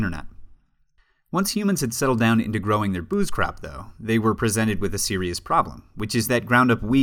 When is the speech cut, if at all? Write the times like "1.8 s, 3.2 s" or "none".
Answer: none